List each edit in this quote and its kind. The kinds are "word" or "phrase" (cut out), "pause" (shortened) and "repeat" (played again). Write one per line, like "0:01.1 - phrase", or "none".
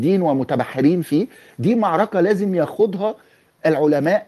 none